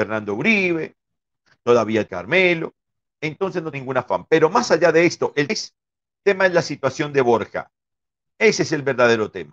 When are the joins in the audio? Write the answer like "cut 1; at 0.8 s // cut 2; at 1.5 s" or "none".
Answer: cut 1; at 2.1 s // cut 2; at 3.7 s // cut 3; at 5.5 s // cut 4; at 6.2 s